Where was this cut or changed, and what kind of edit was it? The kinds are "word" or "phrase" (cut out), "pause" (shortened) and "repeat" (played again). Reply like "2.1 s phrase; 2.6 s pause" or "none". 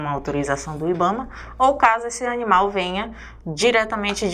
none

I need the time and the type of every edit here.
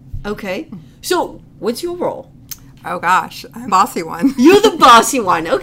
3.7 s word

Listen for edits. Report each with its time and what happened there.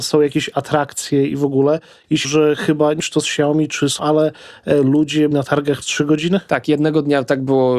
2.2 s word; 3.0 s word; 4.0 s word; 5.3 s word; 5.8 s word

